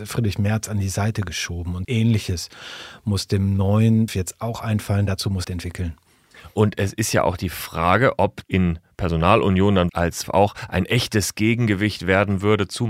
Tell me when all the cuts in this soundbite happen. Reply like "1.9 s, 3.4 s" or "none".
1.8 s, 4.1 s, 5.4 s, 8.4 s, 9.9 s, 10.2 s

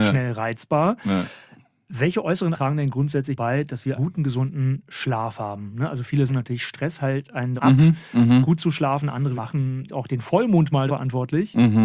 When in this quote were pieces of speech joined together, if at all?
2.5 s, 3.4 s, 3.9 s, 6.3 s, 7.6 s, 9.4 s, 9.9 s, 10.9 s

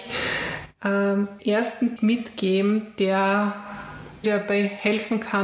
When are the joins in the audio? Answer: 1.4 s, 2.0 s, 4.2 s

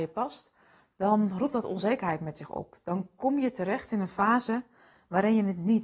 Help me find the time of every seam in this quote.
none

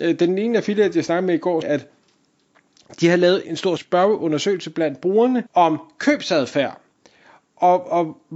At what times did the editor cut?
1.6 s, 3.4 s, 3.8 s, 5.5 s

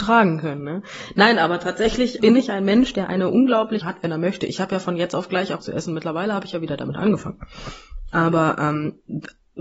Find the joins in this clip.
2.2 s, 3.8 s, 5.6 s

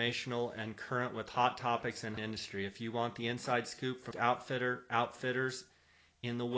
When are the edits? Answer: 2.2 s, 4.1 s

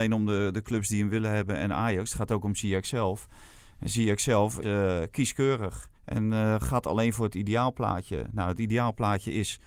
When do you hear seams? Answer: 4.6 s, 6.0 s

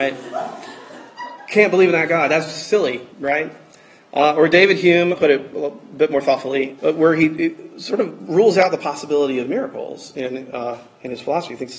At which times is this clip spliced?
3.1 s, 5.1 s, 6.8 s

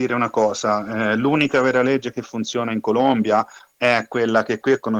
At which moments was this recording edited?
none

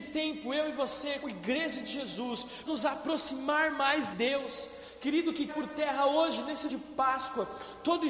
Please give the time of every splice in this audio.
1.2 s, 2.7 s, 4.1 s, 5.5 s, 6.7 s

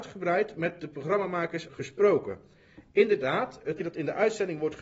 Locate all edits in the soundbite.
1.7 s, 3.8 s

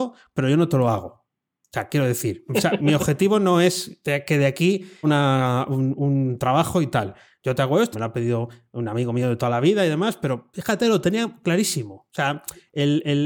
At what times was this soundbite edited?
2.5 s, 2.8 s, 5.0 s, 7.9 s, 10.5 s

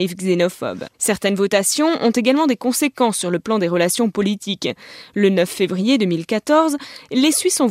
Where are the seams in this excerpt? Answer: 0.9 s

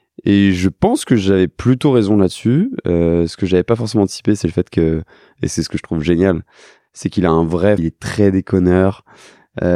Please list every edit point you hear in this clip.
7.8 s

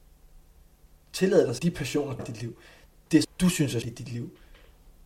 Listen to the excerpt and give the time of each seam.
1.6 s, 2.2 s, 3.2 s, 3.8 s

